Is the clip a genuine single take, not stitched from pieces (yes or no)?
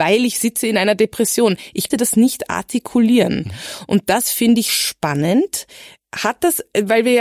no